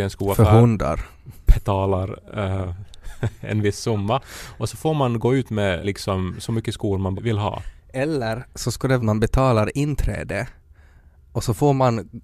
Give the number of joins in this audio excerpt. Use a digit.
4